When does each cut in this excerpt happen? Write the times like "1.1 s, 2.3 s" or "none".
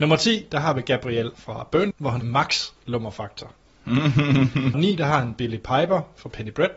1.3 s, 1.9 s, 2.2 s, 4.7 s